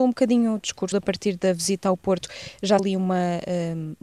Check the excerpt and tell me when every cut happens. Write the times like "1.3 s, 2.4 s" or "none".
0.9 s, 2.8 s